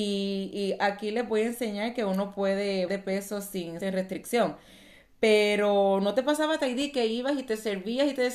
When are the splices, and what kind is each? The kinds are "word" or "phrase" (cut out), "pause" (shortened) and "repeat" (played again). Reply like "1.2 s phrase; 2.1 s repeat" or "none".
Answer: 2.9 s word; 3.8 s word